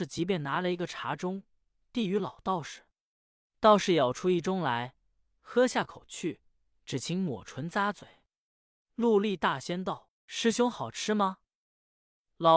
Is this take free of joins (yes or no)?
yes